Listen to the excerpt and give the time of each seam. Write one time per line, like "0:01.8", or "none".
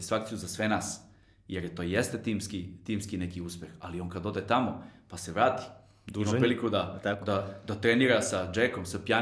none